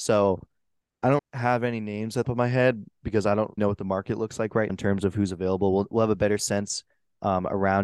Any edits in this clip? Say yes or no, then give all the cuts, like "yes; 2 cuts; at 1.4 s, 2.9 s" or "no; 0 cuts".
yes; 4 cuts; at 1.2 s, 2.2 s, 3.6 s, 4.7 s